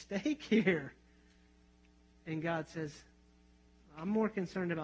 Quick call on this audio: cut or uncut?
uncut